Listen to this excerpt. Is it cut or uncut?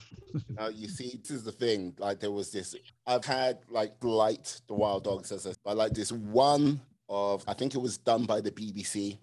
cut